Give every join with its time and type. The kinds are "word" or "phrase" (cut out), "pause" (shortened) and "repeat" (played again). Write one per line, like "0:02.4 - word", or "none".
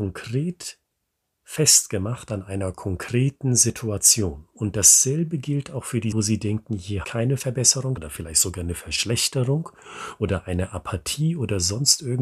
0:06.1 - word
0:07.0 - word
0:08.0 - word